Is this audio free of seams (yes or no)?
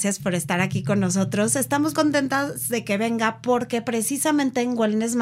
no